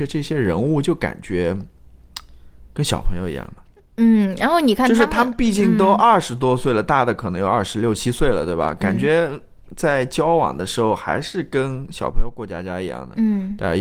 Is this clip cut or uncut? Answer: uncut